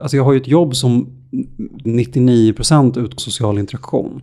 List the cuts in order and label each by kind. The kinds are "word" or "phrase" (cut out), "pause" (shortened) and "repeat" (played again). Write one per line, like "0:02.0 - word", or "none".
0:01.8 - word
0:03.2 - word